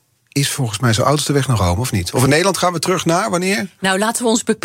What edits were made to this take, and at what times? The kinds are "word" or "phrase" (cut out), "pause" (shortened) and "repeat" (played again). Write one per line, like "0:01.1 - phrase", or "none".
none